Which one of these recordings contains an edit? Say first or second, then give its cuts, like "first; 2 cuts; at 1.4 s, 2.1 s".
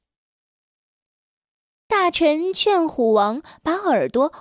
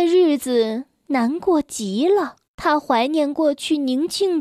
second; 1 cut; at 2.5 s